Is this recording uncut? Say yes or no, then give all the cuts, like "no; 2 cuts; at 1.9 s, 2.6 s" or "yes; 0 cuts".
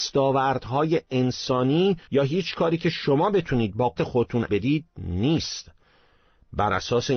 no; 3 cuts; at 2.0 s, 4.0 s, 4.5 s